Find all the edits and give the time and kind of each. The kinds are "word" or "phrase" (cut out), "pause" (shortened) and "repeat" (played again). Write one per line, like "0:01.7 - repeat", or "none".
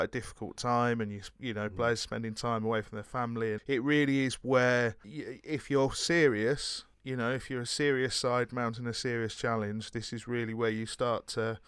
0:03.6 - word